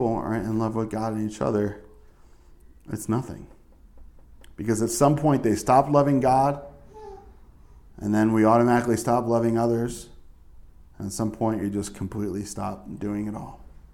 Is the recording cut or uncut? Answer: uncut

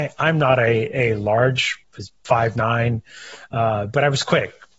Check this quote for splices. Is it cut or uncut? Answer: cut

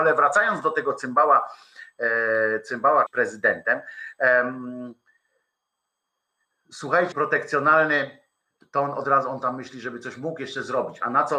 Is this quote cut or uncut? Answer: cut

